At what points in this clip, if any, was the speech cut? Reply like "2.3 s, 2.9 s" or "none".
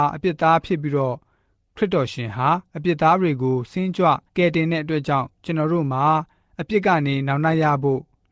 4.3 s